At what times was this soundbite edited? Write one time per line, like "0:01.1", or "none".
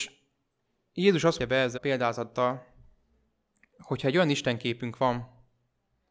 0:01.4
0:01.8